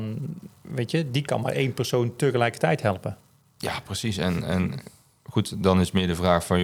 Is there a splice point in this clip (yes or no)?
no